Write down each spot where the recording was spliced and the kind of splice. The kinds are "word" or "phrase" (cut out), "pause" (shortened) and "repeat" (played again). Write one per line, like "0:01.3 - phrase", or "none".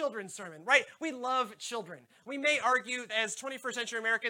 0:03.1 - word